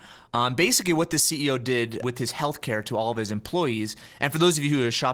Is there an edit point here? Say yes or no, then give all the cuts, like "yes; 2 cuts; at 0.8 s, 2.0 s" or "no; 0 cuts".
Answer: yes; 1 cut; at 2.0 s